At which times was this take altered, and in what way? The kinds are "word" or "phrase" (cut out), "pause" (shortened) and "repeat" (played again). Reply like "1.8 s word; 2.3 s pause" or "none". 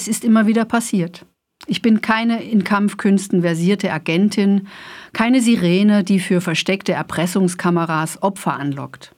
none

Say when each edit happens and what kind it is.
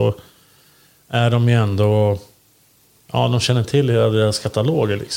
none

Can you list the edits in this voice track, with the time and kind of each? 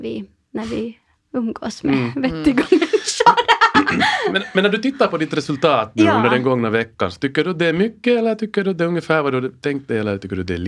none

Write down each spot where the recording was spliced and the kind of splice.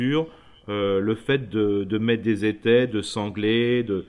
none

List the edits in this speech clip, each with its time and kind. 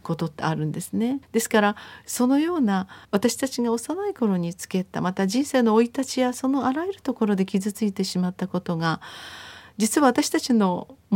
1.2 s pause; 3.0 s pause

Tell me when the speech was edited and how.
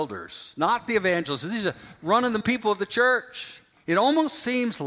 2.4 s word; 3.7 s pause

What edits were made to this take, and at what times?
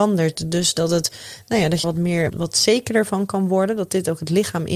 1.8 s word; 2.3 s word

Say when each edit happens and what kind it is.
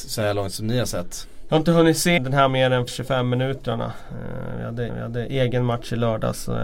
2.2 s word; 2.5 s word; 2.9 s word; 4.9 s repeat

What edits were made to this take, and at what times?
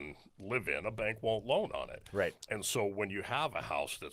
none

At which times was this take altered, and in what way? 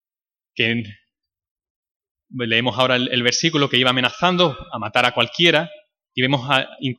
none

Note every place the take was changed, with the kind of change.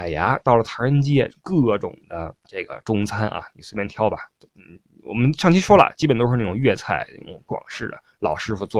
2.4 s pause

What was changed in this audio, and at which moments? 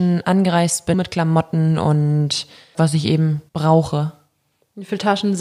0.9 s word; 2.7 s phrase; 3.5 s pause

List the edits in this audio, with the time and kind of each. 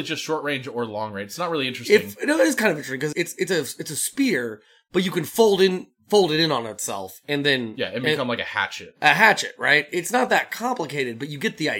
3.1 s word

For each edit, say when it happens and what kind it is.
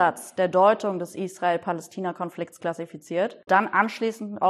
3.5 s word

